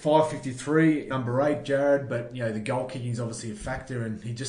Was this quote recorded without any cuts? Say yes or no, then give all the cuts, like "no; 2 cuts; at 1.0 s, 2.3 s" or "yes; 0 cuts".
no; 1 cut; at 1.1 s